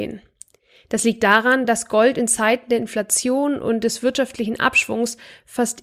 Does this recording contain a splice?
no; 0 cuts

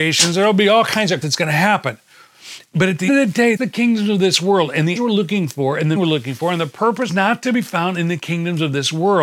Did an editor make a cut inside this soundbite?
yes; 6 cuts; at 1.2 s, 3.1 s, 3.6 s, 5.0 s, 6.0 s, 7.1 s

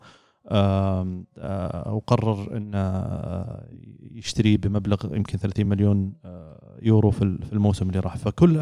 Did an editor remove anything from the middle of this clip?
no; 0 cuts

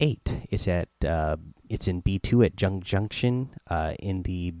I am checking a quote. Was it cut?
no; 0 cuts

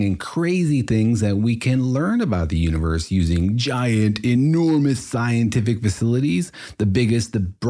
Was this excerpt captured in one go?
yes; 0 cuts

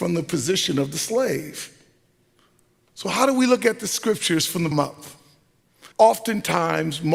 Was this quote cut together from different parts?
yes; 3 cuts; at 2.4 s, 4.7 s, 5.9 s

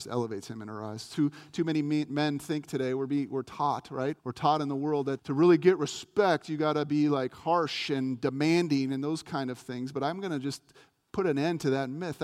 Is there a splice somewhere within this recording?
yes; 2 cuts; at 4.2 s, 5.2 s

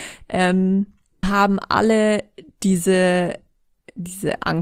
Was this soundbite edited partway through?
yes; 1 cut; at 1.2 s

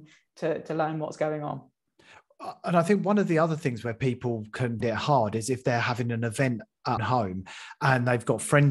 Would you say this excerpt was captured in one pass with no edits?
no; 2 cuts; at 4.8 s, 7.0 s

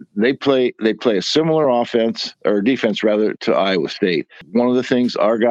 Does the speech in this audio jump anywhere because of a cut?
no; 0 cuts

